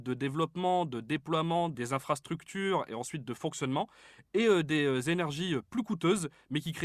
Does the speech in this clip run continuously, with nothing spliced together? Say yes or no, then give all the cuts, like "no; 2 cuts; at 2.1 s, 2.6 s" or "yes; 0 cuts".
yes; 0 cuts